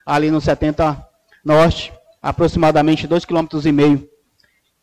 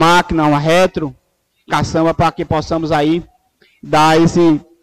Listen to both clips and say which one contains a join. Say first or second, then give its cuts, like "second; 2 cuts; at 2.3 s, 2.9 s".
second; 1 cut; at 1.7 s